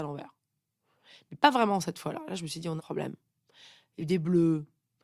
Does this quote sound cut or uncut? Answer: cut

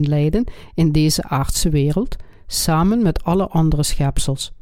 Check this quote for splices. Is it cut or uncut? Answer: uncut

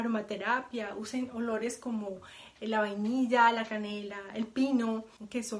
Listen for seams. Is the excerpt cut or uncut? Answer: uncut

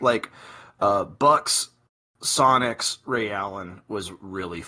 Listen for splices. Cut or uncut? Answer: uncut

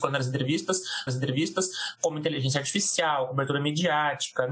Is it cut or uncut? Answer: cut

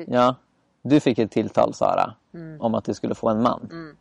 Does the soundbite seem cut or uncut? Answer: uncut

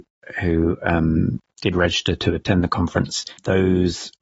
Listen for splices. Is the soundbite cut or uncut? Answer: uncut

